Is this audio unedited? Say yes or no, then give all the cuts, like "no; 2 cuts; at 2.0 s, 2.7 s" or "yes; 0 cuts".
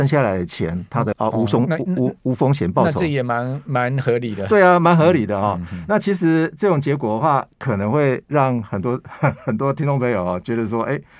no; 1 cut; at 1.1 s